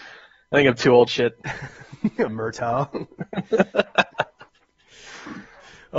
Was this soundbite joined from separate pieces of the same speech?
yes; 3 cuts; at 1.1 s, 2.3 s, 4.5 s

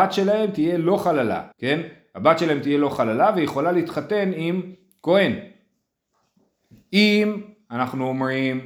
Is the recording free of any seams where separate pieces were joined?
no; 1 cut; at 1.5 s

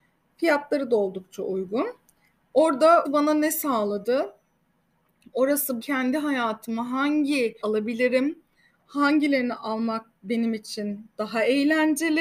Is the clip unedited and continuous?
no; 3 cuts; at 3.0 s, 5.8 s, 7.6 s

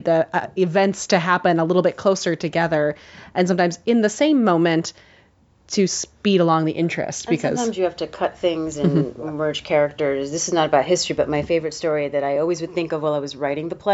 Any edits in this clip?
no; 0 cuts

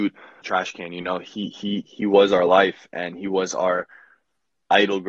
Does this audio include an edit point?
no; 0 cuts

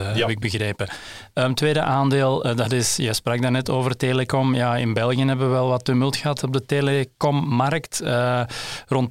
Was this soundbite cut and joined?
no; 0 cuts

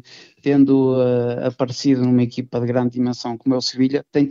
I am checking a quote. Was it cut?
no; 0 cuts

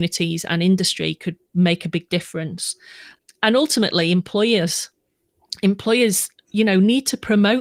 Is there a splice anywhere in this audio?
no; 0 cuts

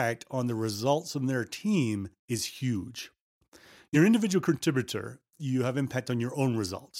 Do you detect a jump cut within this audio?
yes; 2 cuts; at 2.2 s, 3.9 s

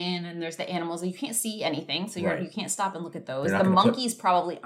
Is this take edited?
no; 0 cuts

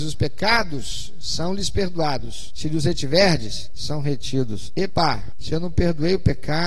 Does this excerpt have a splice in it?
no; 0 cuts

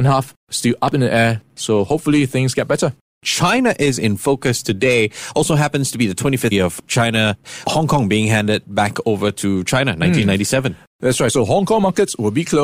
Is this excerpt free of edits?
no; 1 cut; at 6.5 s

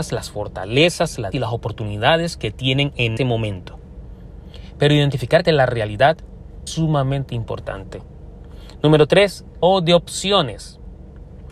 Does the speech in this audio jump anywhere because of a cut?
yes; 5 cuts; at 1.3 s, 3.2 s, 5.4 s, 6.7 s, 9.6 s

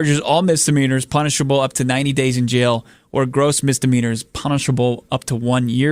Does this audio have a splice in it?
no; 0 cuts

